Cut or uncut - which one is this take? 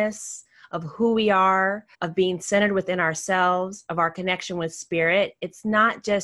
cut